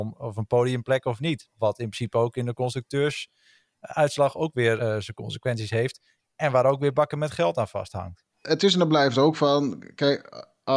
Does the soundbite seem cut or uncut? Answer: cut